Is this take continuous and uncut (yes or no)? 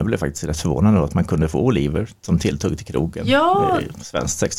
yes